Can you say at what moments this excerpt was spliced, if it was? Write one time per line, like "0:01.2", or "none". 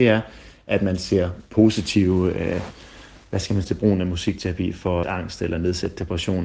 0:03.6
0:05.0